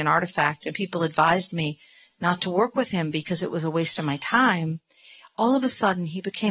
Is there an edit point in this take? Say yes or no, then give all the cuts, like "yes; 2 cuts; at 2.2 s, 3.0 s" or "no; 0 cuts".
no; 0 cuts